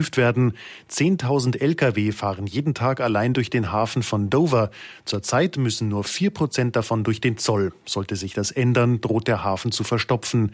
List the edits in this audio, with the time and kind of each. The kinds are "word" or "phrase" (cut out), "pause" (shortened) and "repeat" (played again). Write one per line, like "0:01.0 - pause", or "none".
none